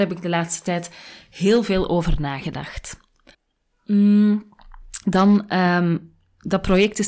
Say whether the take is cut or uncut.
cut